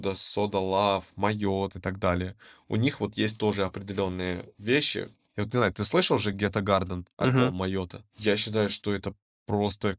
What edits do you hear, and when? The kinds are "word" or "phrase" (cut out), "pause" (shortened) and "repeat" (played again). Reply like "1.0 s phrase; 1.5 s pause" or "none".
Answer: none